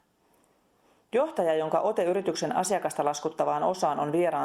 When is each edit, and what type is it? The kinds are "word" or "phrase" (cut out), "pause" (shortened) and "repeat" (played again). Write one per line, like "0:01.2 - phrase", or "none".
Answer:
none